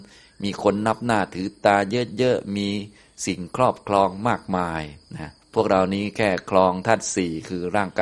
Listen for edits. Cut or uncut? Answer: cut